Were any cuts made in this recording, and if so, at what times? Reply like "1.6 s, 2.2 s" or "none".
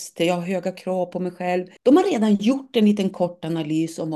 1.8 s